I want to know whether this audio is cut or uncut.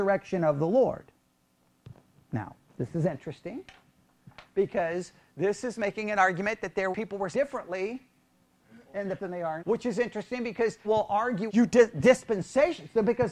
cut